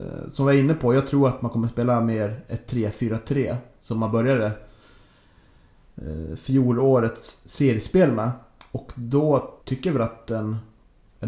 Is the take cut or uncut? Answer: cut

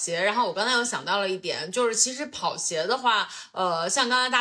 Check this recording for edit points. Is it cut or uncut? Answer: uncut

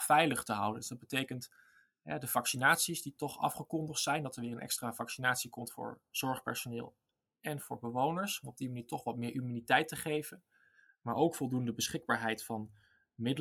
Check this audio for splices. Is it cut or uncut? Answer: uncut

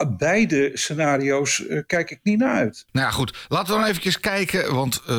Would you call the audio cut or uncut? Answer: uncut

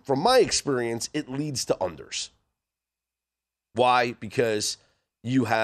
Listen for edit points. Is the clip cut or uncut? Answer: uncut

